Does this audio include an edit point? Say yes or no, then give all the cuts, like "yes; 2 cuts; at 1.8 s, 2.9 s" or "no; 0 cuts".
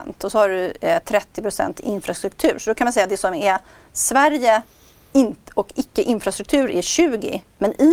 no; 0 cuts